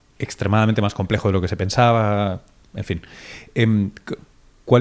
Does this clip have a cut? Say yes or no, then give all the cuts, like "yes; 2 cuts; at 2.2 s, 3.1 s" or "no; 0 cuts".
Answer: no; 0 cuts